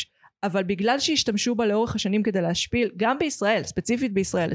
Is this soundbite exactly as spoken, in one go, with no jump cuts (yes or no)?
yes